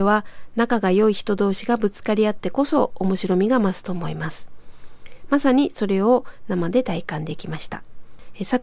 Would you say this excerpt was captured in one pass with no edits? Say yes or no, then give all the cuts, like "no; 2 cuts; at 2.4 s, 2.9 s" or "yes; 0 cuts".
yes; 0 cuts